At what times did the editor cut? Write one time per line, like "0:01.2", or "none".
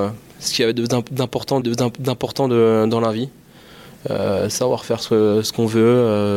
0:01.6

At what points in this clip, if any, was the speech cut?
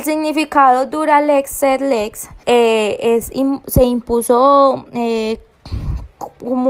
0:02.4

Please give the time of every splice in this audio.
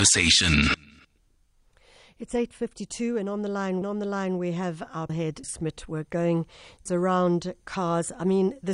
0:03.8
0:05.1
0:05.4
0:06.9

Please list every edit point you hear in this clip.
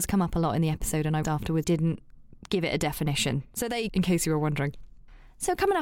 0:01.2
0:01.6
0:03.9

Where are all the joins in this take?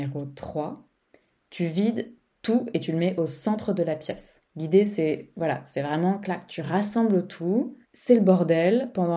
0:04.5
0:07.8

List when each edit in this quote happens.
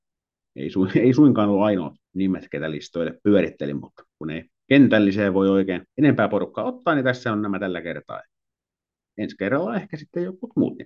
0:02.0
0:04.1
0:05.9

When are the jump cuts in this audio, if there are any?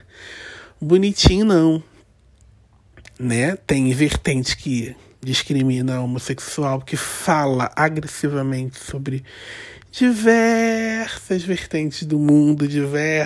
0:03.1
0:05.1

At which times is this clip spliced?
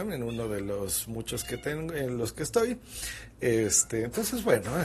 none

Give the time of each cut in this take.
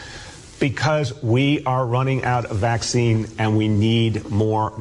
none

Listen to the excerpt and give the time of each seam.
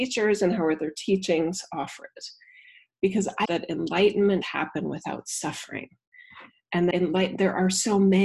0:03.4
0:04.4
0:06.9

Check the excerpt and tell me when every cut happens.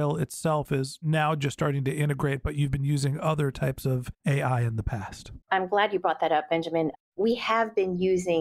0:05.4

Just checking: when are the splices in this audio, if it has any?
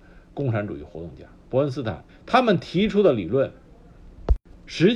0:01.4
0:02.1

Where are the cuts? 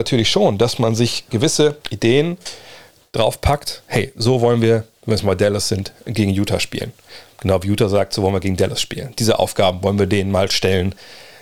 0:01.8

